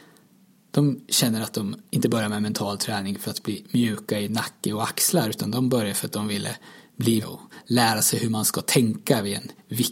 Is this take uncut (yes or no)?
no